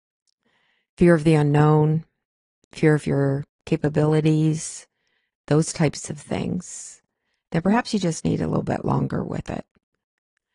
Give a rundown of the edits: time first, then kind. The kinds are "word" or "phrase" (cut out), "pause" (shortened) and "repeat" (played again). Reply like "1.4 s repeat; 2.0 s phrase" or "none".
none